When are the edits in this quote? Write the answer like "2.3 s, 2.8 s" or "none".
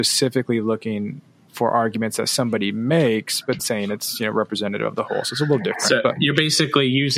3.6 s